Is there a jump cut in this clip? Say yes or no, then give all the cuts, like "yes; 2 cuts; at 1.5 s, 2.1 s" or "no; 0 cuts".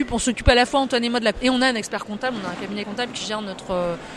yes; 2 cuts; at 1.3 s, 2.8 s